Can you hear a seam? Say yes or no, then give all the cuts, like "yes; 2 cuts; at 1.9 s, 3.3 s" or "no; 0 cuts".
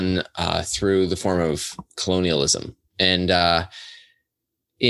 yes; 1 cut; at 2.9 s